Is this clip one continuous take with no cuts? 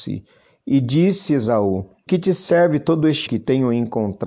no; 2 cuts; at 2.1 s, 3.3 s

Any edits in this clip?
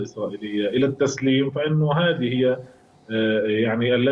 no; 0 cuts

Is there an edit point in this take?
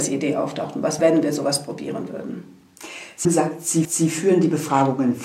yes; 3 cuts; at 1.0 s, 3.2 s, 3.8 s

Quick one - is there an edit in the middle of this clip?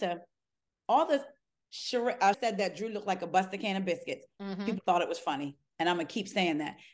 yes; 1 cut; at 2.3 s

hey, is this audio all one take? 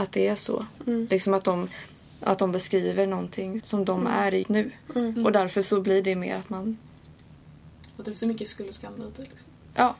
no; 3 cuts; at 3.6 s, 4.4 s, 8.1 s

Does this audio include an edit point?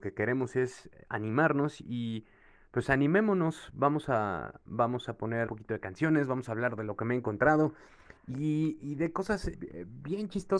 yes; 2 cuts; at 5.5 s, 9.5 s

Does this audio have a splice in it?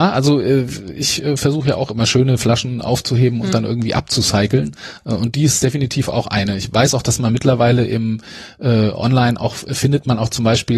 no; 0 cuts

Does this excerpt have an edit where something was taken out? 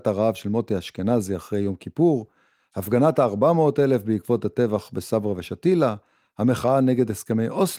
no; 0 cuts

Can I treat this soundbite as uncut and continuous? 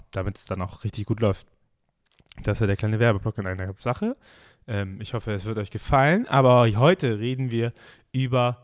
yes; 0 cuts

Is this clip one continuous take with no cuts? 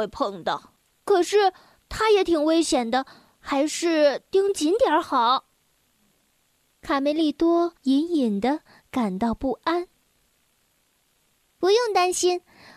no; 1 cut; at 7.8 s

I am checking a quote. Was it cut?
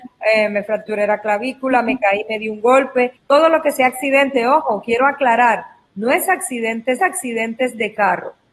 yes; 2 cuts; at 3.2 s, 7.0 s

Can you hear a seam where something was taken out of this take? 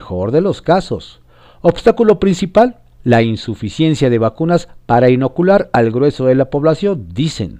no; 0 cuts

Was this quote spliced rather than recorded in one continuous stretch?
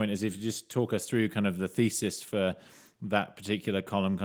no; 0 cuts

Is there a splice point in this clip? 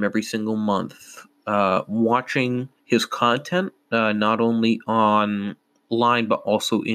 yes; 1 cut; at 2.8 s

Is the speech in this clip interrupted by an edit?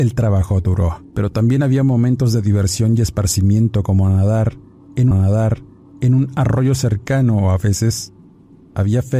yes; 2 cuts; at 1.1 s, 5.1 s

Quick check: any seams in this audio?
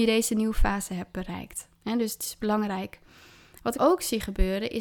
yes; 2 cuts; at 1.7 s, 3.7 s

